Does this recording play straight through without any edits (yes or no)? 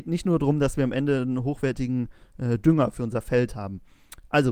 yes